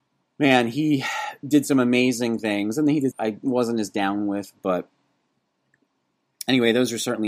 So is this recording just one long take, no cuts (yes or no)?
no